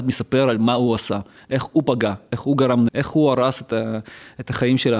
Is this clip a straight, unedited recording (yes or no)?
no